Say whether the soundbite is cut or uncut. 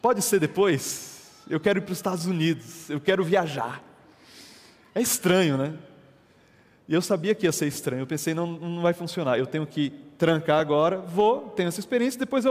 uncut